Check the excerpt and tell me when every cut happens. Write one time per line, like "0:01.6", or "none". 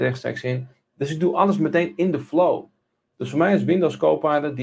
none